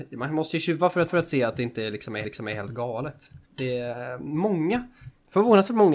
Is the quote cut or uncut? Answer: cut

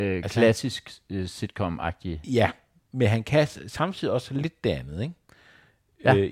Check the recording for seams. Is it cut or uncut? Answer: uncut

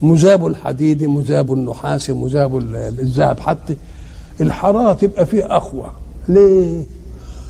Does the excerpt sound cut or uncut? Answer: uncut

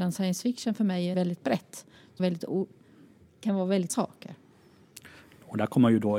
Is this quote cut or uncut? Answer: cut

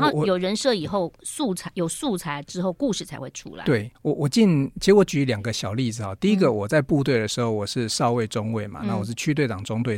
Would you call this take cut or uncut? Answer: cut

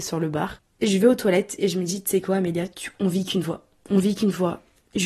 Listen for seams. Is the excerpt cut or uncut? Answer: uncut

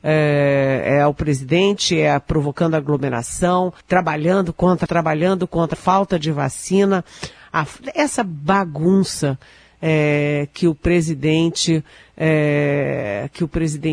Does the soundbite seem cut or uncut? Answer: cut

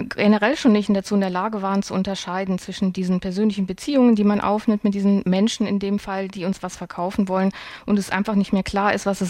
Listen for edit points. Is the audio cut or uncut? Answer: uncut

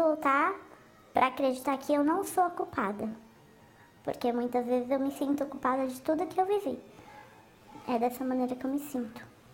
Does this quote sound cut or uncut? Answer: uncut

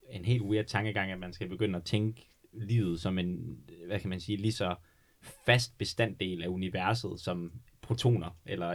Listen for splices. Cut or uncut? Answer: uncut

